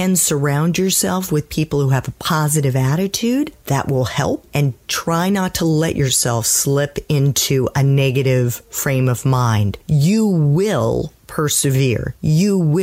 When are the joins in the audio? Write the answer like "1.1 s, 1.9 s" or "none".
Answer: 4.8 s